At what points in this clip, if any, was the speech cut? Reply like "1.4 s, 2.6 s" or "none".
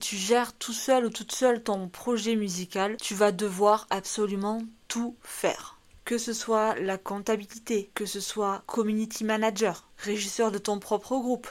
none